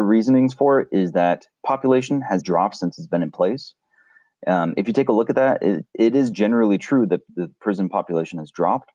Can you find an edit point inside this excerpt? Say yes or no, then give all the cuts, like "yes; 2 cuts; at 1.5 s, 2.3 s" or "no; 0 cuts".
yes; 4 cuts; at 1.6 s, 2.4 s, 5.9 s, 6.3 s